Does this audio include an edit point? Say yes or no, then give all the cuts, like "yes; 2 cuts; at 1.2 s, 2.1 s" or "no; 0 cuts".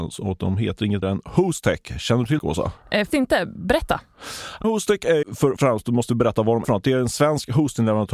yes; 7 cuts; at 1.0 s, 2.4 s, 3.1 s, 4.6 s, 5.2 s, 5.6 s, 6.6 s